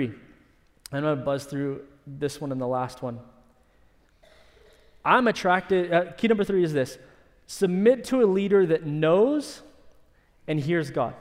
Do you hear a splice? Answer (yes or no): no